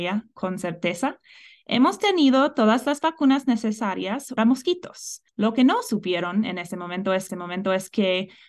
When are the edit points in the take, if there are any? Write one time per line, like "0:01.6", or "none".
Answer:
0:04.4
0:05.3
0:07.3